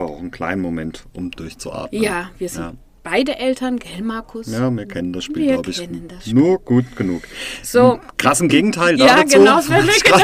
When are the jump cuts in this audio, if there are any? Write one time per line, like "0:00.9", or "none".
none